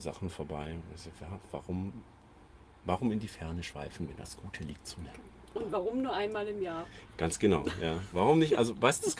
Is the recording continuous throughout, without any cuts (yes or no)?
yes